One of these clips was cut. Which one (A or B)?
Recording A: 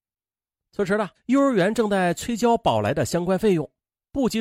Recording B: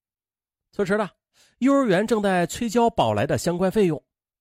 A